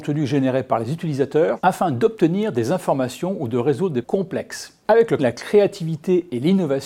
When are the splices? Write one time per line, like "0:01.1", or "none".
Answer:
0:04.0
0:05.2